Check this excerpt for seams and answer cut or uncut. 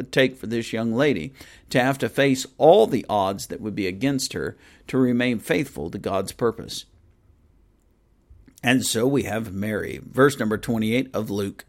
uncut